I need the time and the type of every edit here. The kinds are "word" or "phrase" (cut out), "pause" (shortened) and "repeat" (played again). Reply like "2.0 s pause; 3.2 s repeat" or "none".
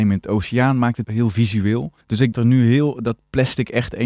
1.0 s word; 2.0 s pause; 2.3 s phrase

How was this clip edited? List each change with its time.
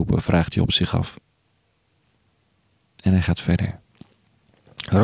none

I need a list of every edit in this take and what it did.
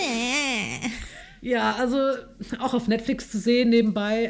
none

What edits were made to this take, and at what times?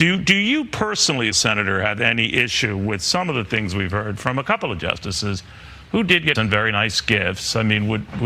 1.3 s word; 6.4 s phrase

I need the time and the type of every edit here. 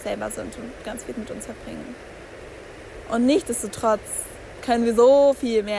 1.1 s word

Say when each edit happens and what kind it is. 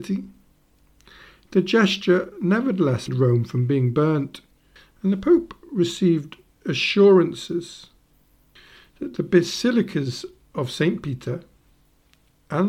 3.1 s word

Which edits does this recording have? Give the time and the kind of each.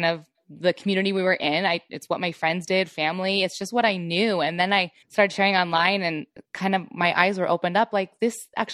5.0 s pause; 6.5 s pause

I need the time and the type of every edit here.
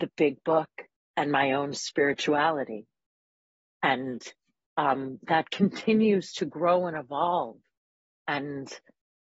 none

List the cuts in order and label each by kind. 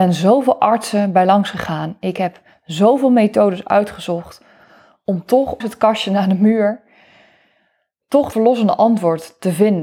5.6 s word; 8.3 s word

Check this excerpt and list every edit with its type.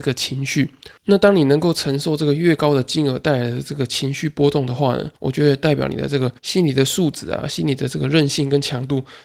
1.0 s pause; 5.2 s pause; 6.4 s pause

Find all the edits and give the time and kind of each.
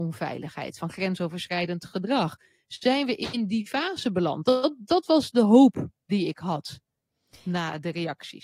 none

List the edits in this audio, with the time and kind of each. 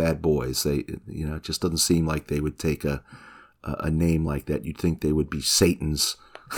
none

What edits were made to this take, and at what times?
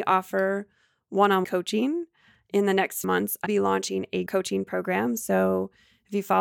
1.4 s word; 3.0 s word; 3.5 s word; 4.3 s word

